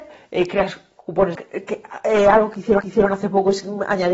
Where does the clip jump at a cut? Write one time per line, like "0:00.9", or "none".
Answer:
0:01.4
0:02.8